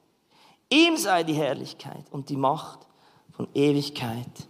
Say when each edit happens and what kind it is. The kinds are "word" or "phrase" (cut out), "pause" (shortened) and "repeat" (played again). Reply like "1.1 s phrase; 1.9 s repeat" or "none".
none